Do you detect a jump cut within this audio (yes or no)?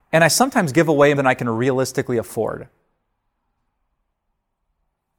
yes